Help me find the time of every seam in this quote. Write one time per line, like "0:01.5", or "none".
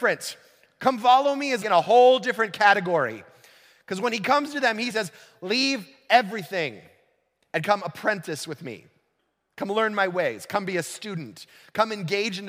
0:01.6
0:04.9

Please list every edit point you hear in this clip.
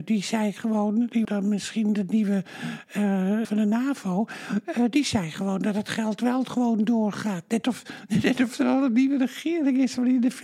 0:01.2
0:03.4

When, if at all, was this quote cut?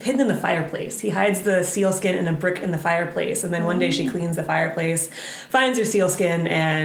none

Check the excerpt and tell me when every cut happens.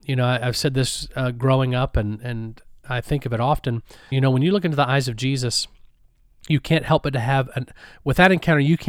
0:04.1

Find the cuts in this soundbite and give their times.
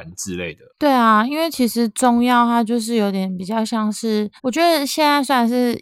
0:04.4

